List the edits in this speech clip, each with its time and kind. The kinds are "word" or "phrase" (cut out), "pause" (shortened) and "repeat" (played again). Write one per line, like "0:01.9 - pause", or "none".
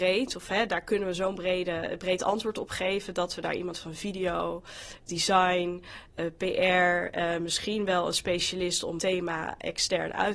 0:05.1 - word
0:09.0 - word